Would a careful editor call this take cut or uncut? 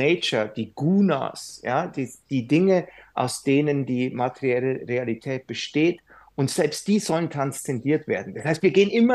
uncut